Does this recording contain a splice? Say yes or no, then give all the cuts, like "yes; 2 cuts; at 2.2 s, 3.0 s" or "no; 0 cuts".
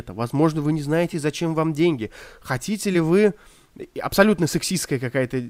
no; 0 cuts